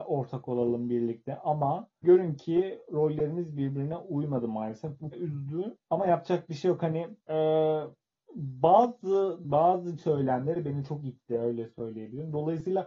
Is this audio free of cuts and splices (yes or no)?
no